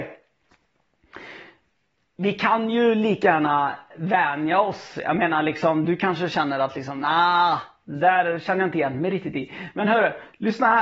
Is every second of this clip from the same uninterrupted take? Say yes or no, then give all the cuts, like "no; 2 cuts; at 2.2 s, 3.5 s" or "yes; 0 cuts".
yes; 0 cuts